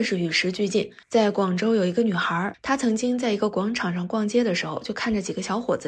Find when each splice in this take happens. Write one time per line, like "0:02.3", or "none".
0:01.0